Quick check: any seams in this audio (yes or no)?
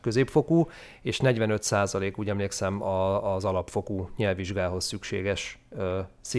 no